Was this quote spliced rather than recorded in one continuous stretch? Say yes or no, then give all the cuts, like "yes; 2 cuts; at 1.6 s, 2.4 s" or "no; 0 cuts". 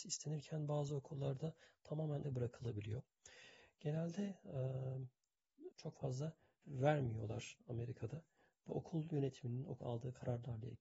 yes; 5 cuts; at 2.2 s, 5.7 s, 6.6 s, 8.7 s, 9.8 s